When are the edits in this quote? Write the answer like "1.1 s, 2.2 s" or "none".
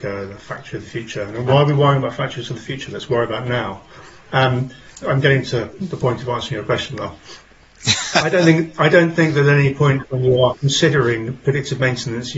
5.0 s